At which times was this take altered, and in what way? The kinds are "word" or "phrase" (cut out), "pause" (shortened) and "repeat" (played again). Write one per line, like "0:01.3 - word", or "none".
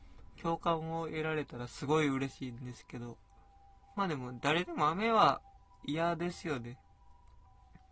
0:03.8 - pause

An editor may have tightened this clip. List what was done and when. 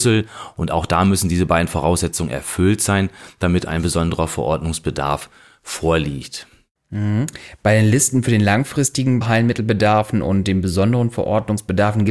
none

